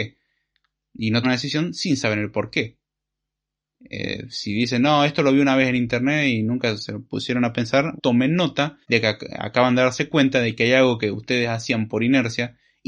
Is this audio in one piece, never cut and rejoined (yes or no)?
no